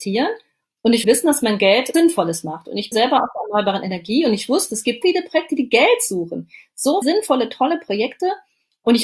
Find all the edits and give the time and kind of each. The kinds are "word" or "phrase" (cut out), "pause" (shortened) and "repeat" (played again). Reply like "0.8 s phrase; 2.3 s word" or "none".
1.0 s word; 1.9 s word; 2.9 s word; 5.0 s word; 7.0 s word